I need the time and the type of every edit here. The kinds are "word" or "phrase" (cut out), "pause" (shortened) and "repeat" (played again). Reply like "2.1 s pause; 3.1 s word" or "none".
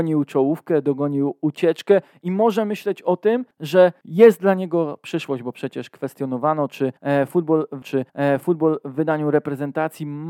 7.8 s repeat

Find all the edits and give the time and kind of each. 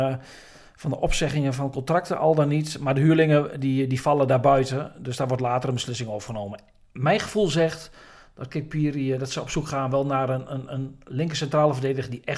none

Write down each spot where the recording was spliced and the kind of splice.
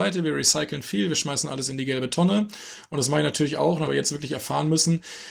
3.9 s phrase

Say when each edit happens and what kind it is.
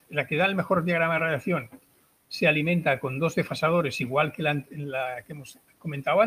none

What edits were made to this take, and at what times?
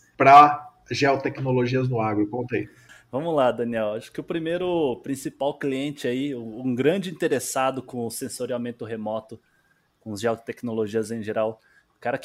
none

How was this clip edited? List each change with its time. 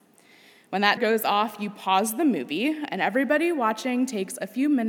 1.0 s word

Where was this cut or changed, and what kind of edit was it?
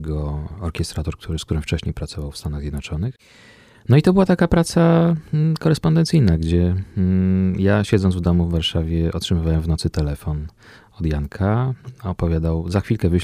none

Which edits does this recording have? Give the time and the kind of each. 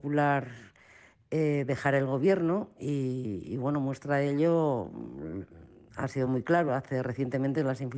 none

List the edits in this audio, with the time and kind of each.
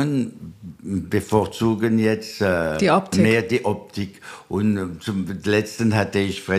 none

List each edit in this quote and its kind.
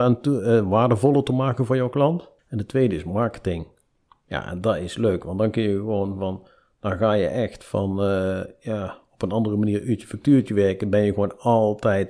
2.4 s pause; 3.9 s pause

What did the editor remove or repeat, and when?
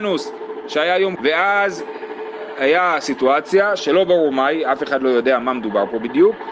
1.2 s word

